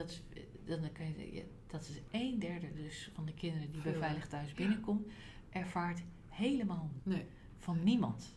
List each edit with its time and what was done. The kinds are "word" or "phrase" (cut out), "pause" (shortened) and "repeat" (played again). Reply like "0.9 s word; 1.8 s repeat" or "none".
7.0 s word